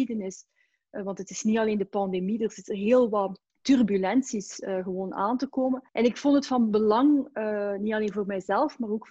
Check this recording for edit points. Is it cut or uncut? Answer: cut